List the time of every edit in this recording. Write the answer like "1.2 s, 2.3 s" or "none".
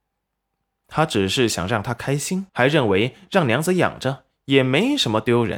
2.5 s